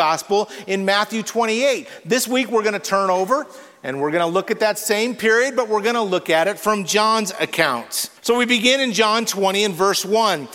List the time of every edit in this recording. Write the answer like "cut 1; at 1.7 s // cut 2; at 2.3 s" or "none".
cut 1; at 8.2 s

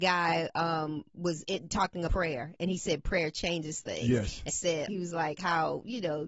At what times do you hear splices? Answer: cut 1; at 2.1 s // cut 2; at 4.5 s // cut 3; at 4.9 s

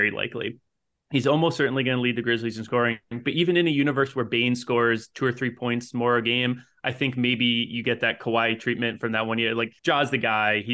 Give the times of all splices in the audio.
cut 1; at 3.0 s // cut 2; at 9.8 s

